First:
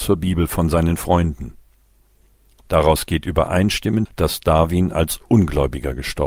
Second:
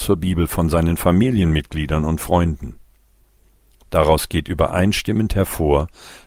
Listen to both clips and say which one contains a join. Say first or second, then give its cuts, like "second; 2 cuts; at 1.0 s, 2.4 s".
first; 2 cuts; at 1.0 s, 4.1 s